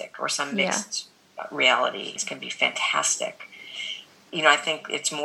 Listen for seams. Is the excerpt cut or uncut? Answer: cut